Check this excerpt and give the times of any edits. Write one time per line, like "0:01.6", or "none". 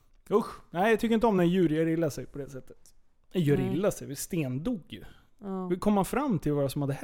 none